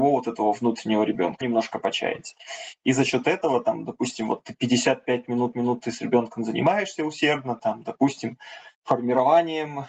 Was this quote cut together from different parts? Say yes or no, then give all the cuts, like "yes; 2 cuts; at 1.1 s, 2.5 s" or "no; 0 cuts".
yes; 3 cuts; at 1.4 s, 5.5 s, 8.7 s